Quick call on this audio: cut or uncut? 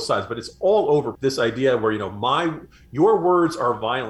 cut